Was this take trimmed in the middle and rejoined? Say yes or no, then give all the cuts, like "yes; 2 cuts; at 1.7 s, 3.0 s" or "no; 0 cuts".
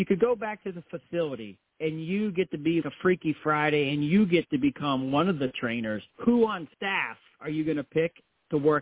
yes; 3 cuts; at 2.8 s, 6.1 s, 6.7 s